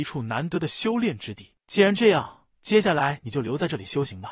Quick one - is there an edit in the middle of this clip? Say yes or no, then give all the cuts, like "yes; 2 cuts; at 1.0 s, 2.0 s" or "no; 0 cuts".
yes; 1 cut; at 2.5 s